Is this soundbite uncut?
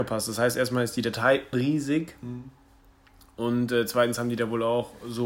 no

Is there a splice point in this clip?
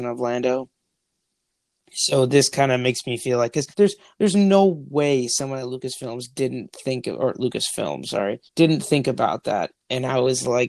yes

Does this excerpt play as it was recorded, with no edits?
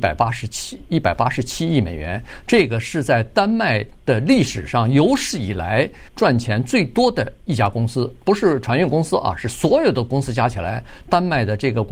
no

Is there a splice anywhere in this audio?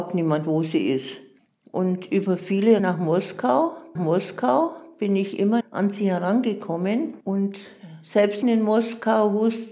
yes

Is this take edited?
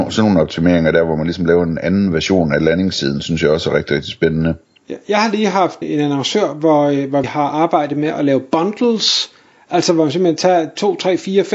yes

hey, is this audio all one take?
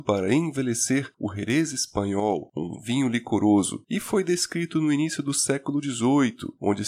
yes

